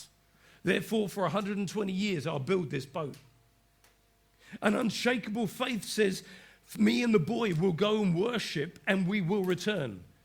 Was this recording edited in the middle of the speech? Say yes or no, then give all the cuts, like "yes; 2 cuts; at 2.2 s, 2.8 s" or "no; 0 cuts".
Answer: no; 0 cuts